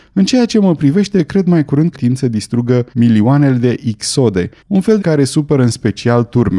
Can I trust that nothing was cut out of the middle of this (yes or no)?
no